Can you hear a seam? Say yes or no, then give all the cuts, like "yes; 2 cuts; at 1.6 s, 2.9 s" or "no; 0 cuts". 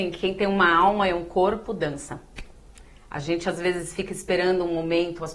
no; 0 cuts